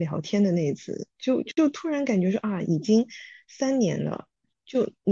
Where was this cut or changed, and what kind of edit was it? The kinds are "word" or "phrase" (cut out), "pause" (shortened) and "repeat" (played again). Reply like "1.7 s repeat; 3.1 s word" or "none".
none